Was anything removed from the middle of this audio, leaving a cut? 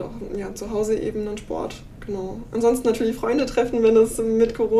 no; 0 cuts

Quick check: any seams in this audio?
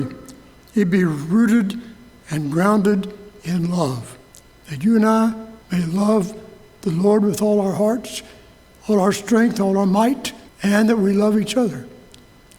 yes; 3 cuts; at 4.3 s, 5.6 s, 10.5 s

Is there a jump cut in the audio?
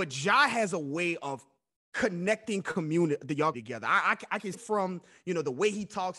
yes; 3 cuts; at 1.8 s, 3.5 s, 4.5 s

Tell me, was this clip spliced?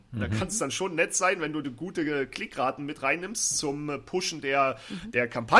no; 0 cuts

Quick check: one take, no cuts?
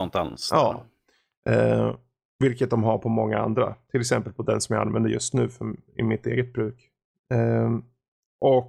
yes; 0 cuts

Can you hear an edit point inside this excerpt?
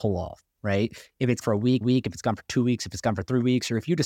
yes; 2 cuts; at 1.4 s, 1.8 s

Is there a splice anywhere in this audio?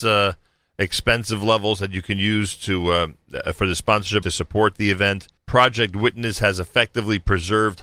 yes; 2 cuts; at 4.2 s, 5.4 s

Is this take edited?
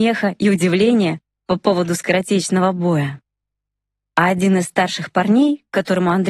no; 0 cuts

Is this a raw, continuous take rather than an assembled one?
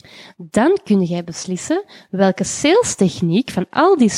yes; 0 cuts

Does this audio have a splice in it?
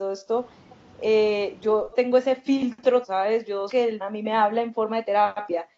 yes; 4 cuts; at 1.9 s, 3.0 s, 3.7 s, 4.0 s

